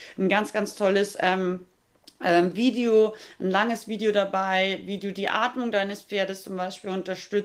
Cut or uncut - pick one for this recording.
uncut